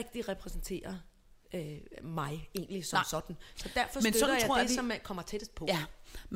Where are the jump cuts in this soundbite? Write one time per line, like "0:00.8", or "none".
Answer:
0:01.4